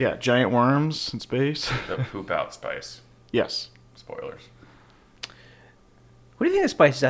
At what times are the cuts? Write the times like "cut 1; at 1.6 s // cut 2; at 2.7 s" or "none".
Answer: none